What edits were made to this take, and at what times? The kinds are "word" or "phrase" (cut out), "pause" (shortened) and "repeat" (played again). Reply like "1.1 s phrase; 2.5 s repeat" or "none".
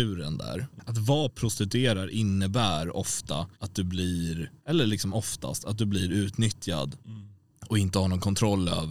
3.5 s pause; 4.6 s pause; 7.0 s pause